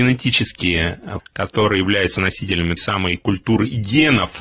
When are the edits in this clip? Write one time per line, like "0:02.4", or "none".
0:01.2
0:02.8